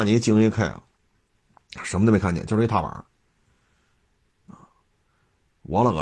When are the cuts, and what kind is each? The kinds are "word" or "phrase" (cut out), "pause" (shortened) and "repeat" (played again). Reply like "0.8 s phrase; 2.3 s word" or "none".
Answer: none